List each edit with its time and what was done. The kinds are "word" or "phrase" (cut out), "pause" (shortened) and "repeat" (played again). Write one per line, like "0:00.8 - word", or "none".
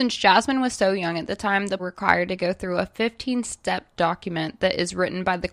0:01.8 - phrase